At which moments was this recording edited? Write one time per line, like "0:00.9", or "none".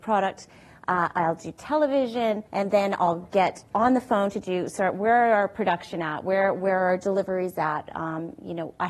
0:02.5
0:04.8